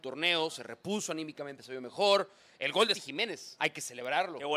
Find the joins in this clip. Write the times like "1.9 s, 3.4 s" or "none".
2.9 s, 3.6 s